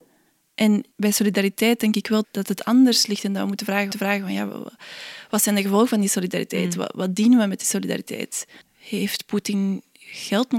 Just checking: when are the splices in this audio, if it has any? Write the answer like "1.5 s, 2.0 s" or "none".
0.9 s, 2.2 s, 3.9 s, 8.6 s